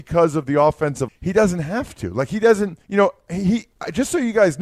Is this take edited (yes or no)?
yes